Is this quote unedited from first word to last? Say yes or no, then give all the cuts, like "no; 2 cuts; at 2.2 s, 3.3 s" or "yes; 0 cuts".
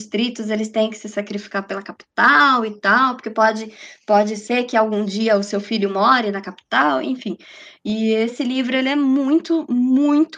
yes; 0 cuts